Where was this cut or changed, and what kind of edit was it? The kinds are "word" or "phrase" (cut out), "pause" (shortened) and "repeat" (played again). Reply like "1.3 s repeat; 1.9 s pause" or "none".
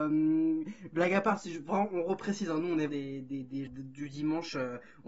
2.9 s word; 3.7 s word